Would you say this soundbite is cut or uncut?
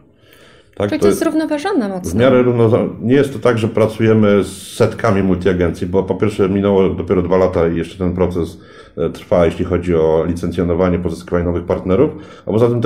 uncut